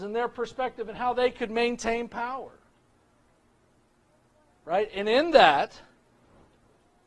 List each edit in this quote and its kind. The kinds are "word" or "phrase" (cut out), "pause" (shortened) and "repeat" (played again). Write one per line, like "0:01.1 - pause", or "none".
none